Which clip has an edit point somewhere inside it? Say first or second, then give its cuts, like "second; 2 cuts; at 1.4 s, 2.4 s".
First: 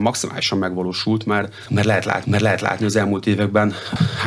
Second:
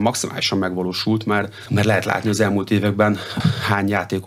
first; 1 cut; at 2.2 s